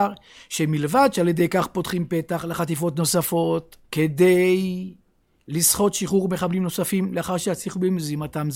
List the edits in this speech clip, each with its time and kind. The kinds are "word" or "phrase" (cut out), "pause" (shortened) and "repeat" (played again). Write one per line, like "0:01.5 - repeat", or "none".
0:03.8 - pause